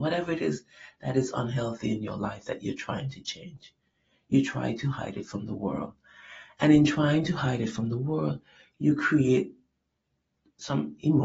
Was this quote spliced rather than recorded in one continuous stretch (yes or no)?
no